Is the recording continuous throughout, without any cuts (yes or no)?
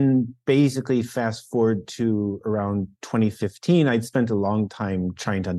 yes